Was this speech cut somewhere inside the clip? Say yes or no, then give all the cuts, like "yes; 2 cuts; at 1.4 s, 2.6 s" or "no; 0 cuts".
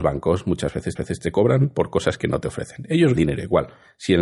yes; 2 cuts; at 1.0 s, 3.2 s